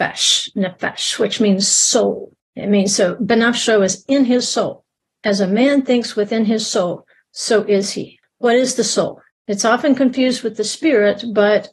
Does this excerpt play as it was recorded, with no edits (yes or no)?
yes